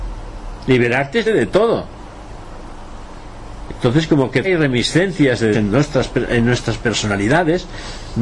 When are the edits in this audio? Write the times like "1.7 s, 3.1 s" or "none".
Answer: 1.3 s, 4.4 s, 5.5 s

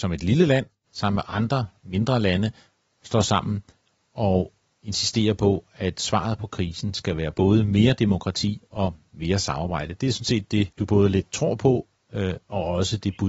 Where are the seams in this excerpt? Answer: 10.7 s

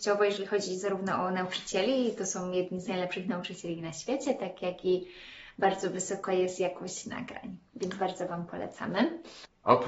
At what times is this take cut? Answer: none

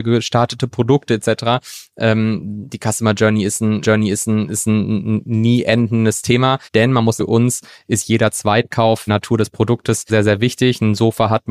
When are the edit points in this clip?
3.8 s, 6.7 s, 7.2 s, 9.1 s, 10.1 s

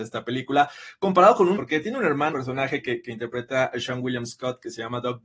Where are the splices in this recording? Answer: 1.6 s, 2.3 s

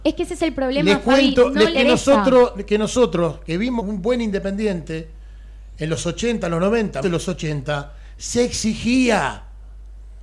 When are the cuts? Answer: 1.7 s, 3.8 s, 7.0 s

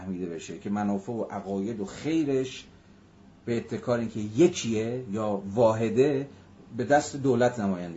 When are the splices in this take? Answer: none

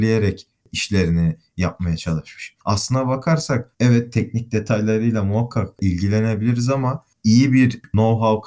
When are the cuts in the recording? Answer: 2.6 s, 3.7 s, 7.1 s

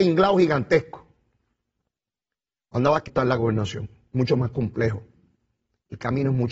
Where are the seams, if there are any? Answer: 3.1 s

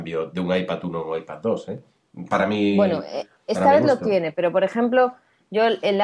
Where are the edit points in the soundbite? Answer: none

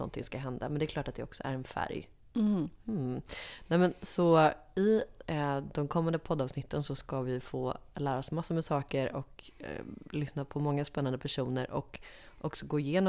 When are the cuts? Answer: none

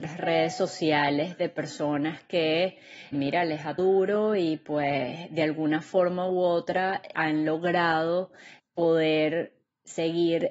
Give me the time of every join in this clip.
3.1 s, 3.8 s, 7.1 s, 8.6 s

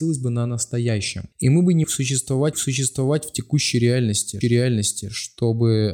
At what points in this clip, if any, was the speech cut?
1.3 s, 1.8 s, 2.5 s, 4.4 s

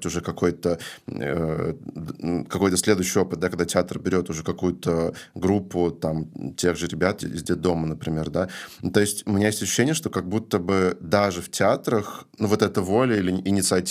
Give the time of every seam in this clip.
7.2 s

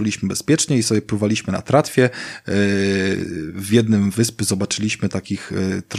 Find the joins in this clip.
4.1 s

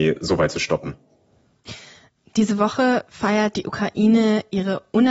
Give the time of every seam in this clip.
none

